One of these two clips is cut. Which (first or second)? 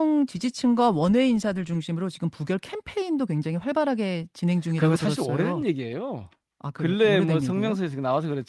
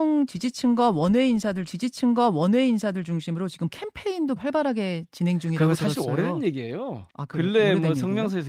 second